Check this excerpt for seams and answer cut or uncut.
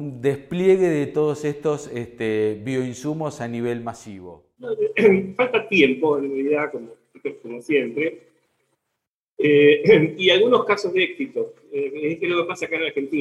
uncut